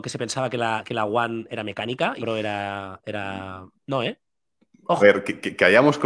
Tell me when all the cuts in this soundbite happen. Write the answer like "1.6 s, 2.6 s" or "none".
1.5 s, 2.2 s, 3.7 s, 5.0 s